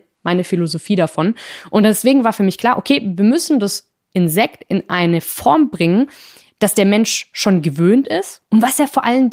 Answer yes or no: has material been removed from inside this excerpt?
no